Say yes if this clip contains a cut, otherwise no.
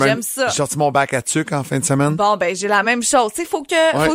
no